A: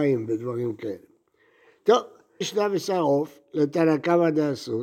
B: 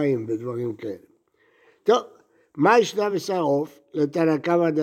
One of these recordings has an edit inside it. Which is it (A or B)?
A